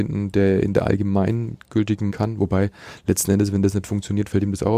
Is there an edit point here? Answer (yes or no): yes